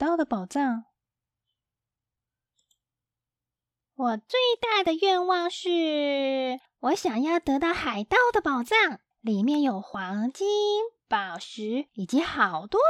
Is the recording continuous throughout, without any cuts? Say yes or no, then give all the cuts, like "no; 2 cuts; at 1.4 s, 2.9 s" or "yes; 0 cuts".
no; 1 cut; at 9.1 s